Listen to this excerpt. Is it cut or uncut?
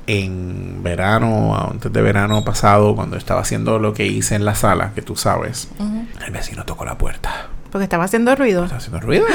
uncut